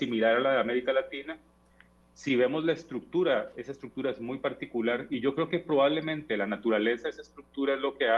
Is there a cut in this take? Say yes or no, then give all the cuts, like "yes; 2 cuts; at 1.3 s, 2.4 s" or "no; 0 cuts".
no; 0 cuts